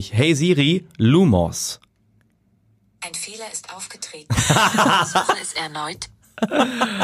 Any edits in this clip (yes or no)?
no